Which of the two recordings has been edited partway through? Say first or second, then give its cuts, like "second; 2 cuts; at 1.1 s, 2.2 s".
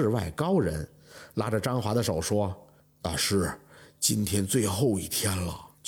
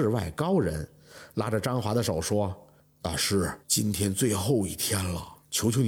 second; 1 cut; at 3.6 s